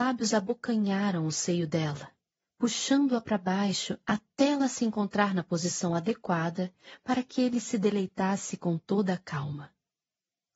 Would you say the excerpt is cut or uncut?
uncut